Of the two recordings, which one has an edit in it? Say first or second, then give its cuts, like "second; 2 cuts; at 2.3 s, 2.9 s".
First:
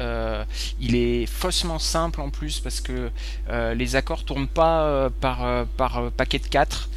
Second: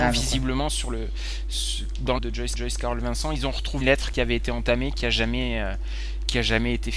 second; 3 cuts; at 2.2 s, 2.5 s, 3.8 s